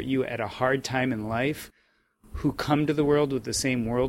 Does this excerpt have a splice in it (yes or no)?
no